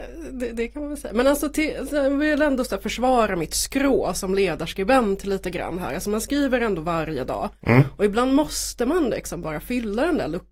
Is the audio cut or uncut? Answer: uncut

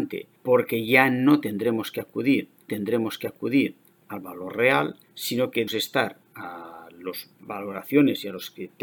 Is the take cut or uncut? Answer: cut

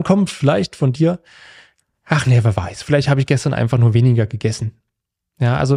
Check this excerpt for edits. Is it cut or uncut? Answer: uncut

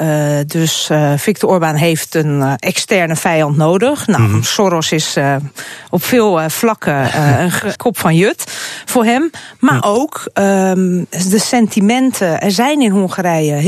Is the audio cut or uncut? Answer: cut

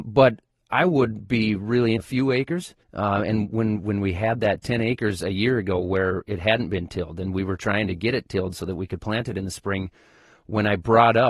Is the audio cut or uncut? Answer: cut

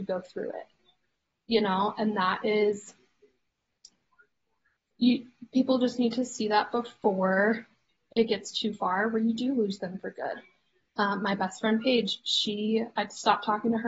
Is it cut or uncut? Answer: uncut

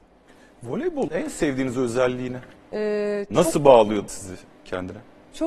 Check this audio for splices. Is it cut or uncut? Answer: cut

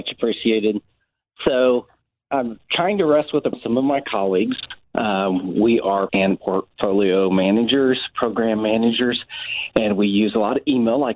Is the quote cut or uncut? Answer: cut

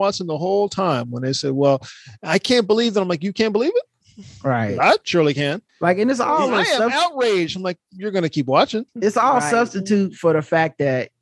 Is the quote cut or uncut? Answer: cut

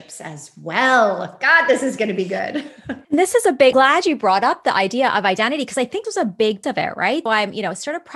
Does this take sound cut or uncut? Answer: cut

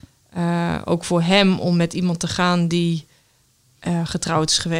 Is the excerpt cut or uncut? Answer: uncut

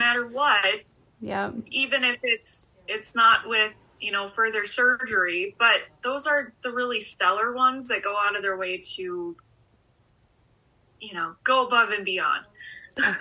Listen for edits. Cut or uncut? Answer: uncut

